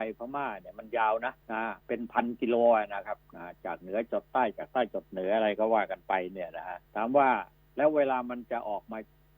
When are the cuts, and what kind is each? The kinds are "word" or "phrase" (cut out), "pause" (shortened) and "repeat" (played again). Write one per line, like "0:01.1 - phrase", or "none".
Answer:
0:01.4 - pause
0:01.8 - pause
0:06.8 - pause
0:07.5 - pause

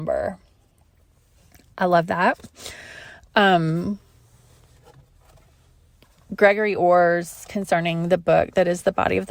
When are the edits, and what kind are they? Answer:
none

